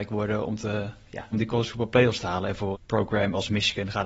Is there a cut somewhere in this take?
yes; 2 cuts; at 1.3 s, 2.7 s

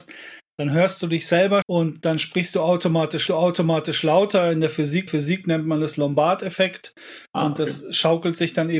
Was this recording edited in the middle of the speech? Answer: yes; 3 cuts; at 1.6 s, 3.3 s, 5.1 s

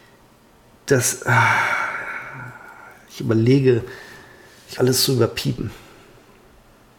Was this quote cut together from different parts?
yes; 1 cut; at 4.8 s

